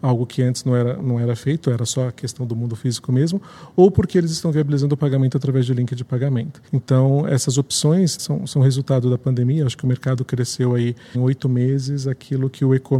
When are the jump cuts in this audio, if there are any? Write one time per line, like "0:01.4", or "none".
0:01.0
0:06.7
0:08.2
0:11.1